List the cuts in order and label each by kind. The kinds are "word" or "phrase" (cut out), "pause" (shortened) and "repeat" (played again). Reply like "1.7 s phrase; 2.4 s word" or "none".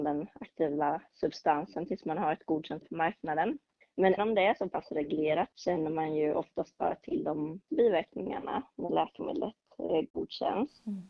2.8 s word; 4.2 s word; 5.5 s word; 7.7 s word